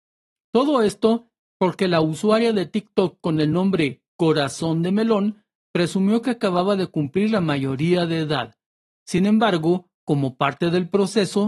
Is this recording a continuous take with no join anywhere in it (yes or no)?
yes